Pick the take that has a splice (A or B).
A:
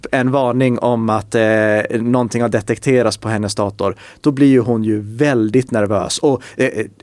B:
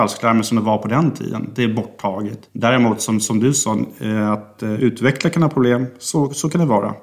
B